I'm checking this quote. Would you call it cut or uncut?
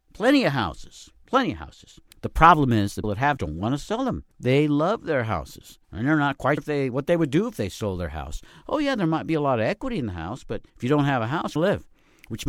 cut